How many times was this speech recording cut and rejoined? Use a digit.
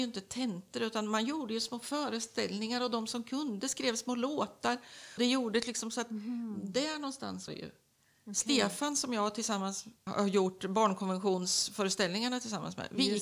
3